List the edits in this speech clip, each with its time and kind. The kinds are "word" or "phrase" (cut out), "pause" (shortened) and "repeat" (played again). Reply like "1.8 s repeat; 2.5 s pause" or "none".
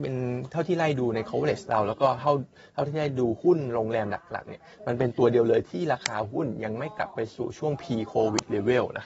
none